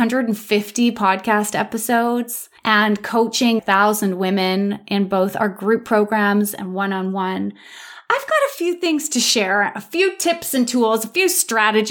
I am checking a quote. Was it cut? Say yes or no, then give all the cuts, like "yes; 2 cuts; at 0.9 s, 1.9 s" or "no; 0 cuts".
yes; 2 cuts; at 2.6 s, 3.6 s